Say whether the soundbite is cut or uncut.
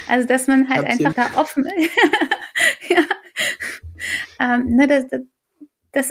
cut